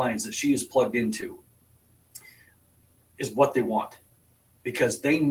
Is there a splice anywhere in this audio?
no; 0 cuts

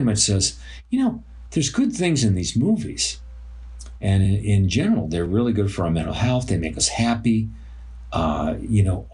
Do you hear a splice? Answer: no; 0 cuts

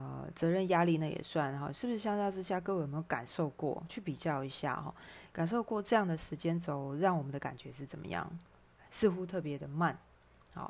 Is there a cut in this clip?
no; 0 cuts

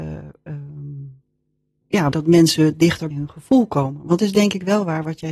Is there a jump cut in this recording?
yes; 4 cuts; at 1.8 s, 2.1 s, 3.1 s, 4.2 s

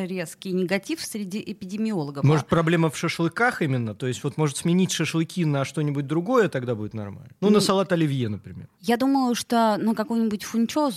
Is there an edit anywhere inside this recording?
yes; 2 cuts; at 7.3 s, 8.7 s

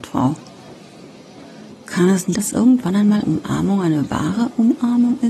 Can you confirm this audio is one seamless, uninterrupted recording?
no; 2 cuts; at 2.3 s, 3.2 s

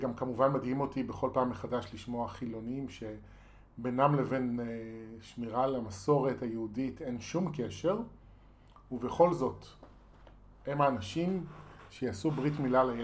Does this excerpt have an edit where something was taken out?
no; 0 cuts

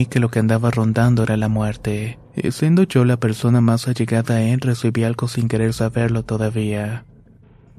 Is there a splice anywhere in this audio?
yes; 1 cut; at 2.2 s

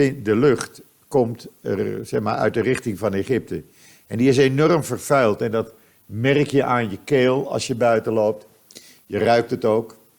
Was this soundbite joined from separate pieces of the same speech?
no; 0 cuts

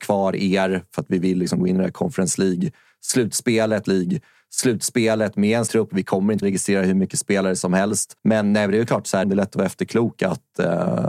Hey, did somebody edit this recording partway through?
yes; 5 cuts; at 3.9 s, 5.7 s, 6.4 s, 8.2 s, 9.2 s

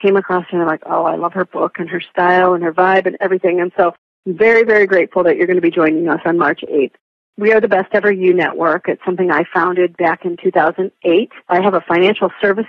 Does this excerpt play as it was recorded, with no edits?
no; 1 cut; at 11.4 s

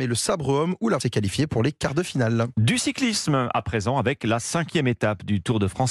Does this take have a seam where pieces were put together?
yes; 1 cut; at 1.0 s

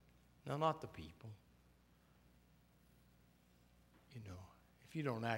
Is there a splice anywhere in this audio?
no; 0 cuts

